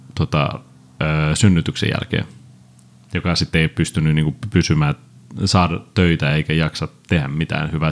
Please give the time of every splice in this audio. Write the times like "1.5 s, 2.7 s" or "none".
none